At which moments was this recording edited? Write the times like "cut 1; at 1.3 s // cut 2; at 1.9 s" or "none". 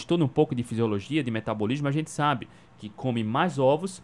none